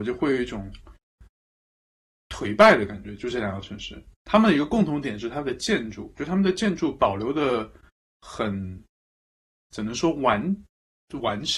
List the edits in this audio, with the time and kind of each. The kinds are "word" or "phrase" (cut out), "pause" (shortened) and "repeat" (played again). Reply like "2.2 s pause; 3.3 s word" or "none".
2.1 s word